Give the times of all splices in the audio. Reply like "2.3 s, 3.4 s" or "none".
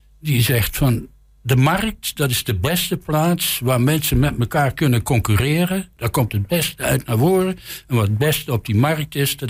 none